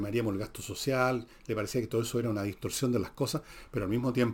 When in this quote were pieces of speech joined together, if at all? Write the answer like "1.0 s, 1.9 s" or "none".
none